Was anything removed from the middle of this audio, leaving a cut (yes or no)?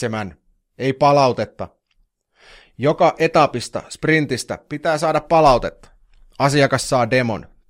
no